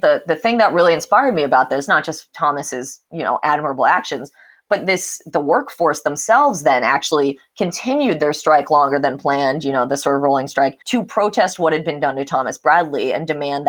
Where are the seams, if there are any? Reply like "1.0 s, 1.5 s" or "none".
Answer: 10.8 s